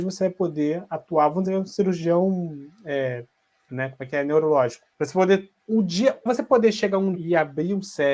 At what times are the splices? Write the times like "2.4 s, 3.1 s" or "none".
1.5 s, 3.7 s, 4.9 s, 5.6 s, 6.3 s, 7.1 s